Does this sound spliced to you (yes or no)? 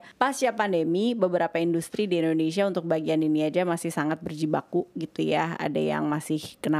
no